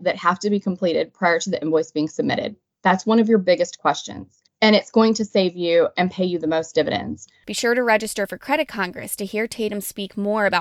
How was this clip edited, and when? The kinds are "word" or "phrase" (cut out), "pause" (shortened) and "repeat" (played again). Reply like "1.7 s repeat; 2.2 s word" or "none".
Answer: 4.5 s pause